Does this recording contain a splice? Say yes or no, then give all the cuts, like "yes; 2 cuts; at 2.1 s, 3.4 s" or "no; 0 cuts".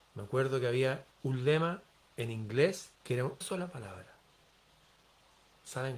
yes; 4 cuts; at 1.1 s, 1.9 s, 3.0 s, 3.4 s